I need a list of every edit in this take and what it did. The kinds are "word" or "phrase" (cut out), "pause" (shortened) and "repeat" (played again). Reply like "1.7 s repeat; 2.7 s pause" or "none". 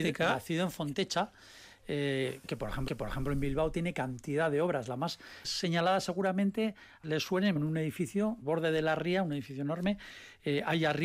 2.9 s repeat; 5.4 s word; 7.0 s phrase; 7.6 s word; 8.4 s word